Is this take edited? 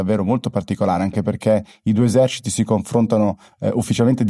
no; 0 cuts

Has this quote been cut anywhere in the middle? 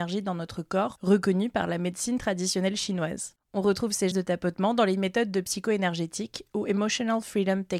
yes; 1 cut; at 4.1 s

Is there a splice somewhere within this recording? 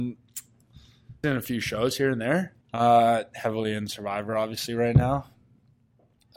yes; 2 cuts; at 1.2 s, 2.6 s

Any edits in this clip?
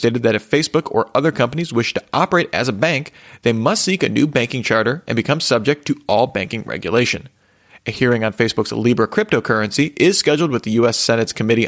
no; 0 cuts

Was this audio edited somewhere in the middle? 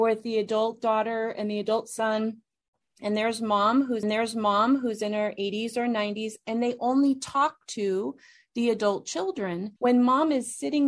yes; 2 cuts; at 4.0 s, 9.8 s

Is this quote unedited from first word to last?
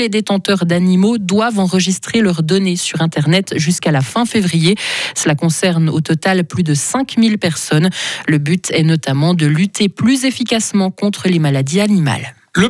yes; 0 cuts

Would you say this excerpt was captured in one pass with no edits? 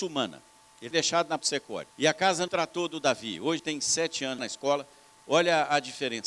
no; 6 cuts; at 0.9 s, 1.4 s, 1.9 s, 2.5 s, 3.6 s, 4.4 s

